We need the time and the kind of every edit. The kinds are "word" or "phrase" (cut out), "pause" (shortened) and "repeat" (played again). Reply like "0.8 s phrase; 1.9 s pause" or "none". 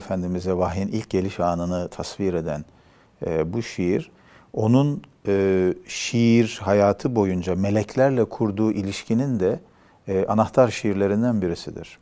none